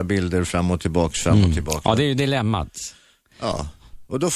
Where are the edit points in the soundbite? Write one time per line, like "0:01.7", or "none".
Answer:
none